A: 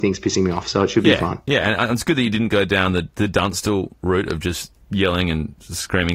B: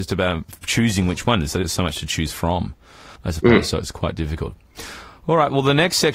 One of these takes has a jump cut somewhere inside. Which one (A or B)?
B